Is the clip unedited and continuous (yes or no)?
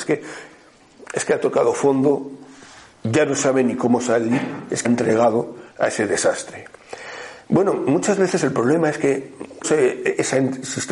no